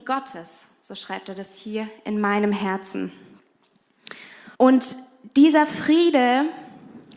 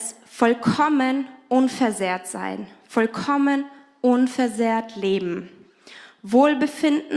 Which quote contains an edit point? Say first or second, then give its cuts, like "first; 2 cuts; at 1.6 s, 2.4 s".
first; 1 cut; at 4.5 s